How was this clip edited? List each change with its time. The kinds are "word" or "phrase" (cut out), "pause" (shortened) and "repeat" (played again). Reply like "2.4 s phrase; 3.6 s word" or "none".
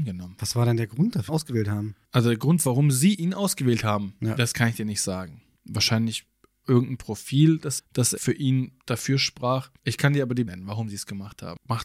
1.3 s phrase; 2.0 s pause; 5.6 s pause; 7.8 s word; 8.2 s word; 8.8 s pause; 9.8 s pause; 10.5 s word